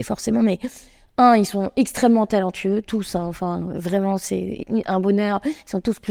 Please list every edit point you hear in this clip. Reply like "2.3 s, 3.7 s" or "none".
none